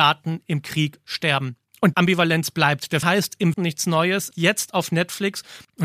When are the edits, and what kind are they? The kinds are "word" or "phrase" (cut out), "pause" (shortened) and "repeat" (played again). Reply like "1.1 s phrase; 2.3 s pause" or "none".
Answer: 1.9 s word; 3.0 s word; 3.5 s word; 4.3 s word